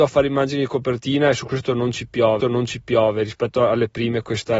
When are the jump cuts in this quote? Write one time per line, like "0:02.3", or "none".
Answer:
0:02.4